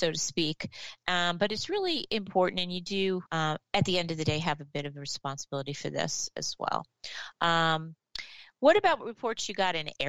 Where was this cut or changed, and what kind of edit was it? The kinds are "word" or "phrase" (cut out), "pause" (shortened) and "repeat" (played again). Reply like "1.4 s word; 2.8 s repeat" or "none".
3.3 s pause